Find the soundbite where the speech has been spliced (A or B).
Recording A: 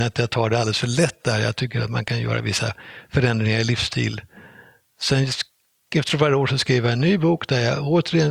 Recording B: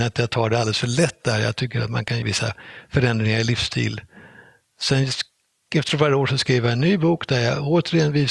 B